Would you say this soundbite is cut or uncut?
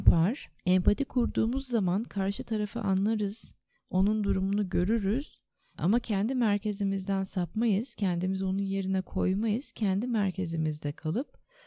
uncut